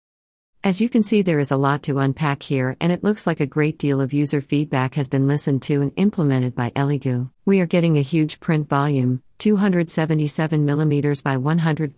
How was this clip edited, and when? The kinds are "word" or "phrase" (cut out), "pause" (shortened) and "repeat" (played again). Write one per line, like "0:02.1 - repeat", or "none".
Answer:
0:07.3 - pause